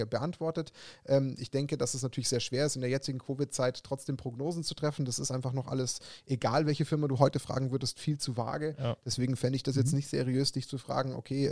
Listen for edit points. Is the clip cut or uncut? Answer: uncut